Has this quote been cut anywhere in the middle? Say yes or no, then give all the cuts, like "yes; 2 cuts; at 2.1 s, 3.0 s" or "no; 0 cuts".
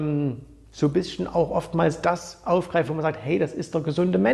no; 0 cuts